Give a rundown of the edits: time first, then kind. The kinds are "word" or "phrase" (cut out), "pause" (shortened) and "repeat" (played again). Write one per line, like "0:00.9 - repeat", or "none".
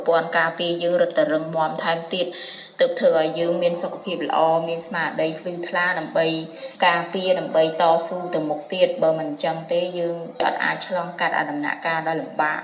0:06.7 - pause